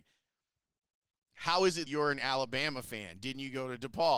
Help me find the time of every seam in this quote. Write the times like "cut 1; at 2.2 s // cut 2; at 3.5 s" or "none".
cut 1; at 1.9 s

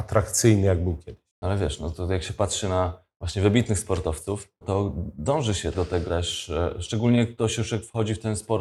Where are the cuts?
cut 1; at 4.6 s // cut 2; at 5.7 s // cut 3; at 6.1 s

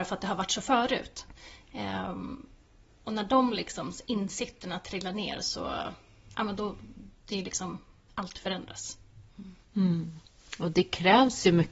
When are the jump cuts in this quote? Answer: cut 1; at 9.6 s

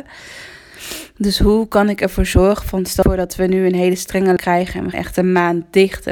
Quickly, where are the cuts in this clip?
cut 1; at 3.0 s // cut 2; at 4.4 s // cut 3; at 4.9 s

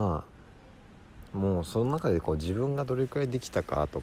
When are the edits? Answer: cut 1; at 1.3 s

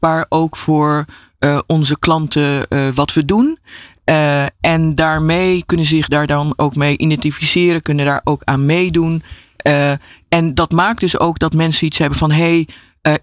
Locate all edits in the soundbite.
none

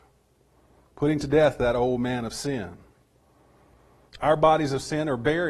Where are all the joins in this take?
none

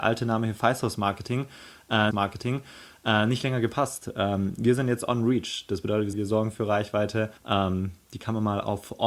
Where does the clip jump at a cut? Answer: cut 1; at 2.1 s // cut 2; at 6.1 s // cut 3; at 7.4 s

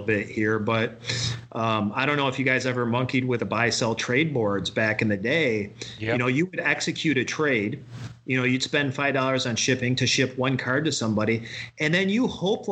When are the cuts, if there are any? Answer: cut 1; at 3.4 s

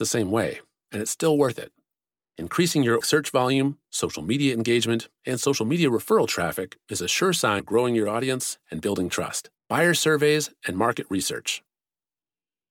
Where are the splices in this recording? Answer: cut 1; at 3.0 s // cut 2; at 7.6 s // cut 3; at 9.6 s

